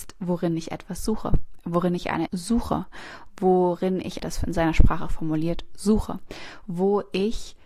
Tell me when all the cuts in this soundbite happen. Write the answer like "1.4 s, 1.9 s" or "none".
2.3 s, 4.2 s